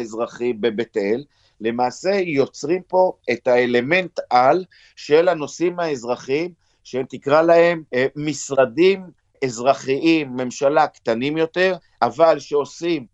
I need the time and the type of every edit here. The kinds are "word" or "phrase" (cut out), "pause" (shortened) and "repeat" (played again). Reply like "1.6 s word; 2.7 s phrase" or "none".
none